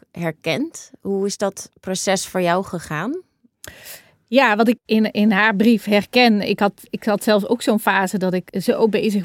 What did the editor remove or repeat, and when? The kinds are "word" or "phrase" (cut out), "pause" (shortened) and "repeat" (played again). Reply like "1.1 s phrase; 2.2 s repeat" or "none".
none